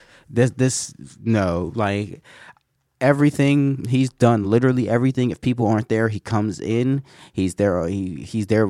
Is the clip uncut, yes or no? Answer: yes